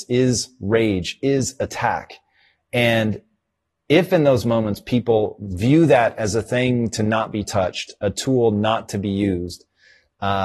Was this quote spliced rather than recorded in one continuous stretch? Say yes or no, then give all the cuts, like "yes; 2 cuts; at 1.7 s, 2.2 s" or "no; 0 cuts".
no; 0 cuts